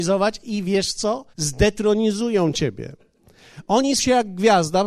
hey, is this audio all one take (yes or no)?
no